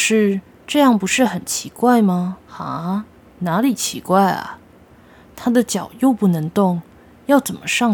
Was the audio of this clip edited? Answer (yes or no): yes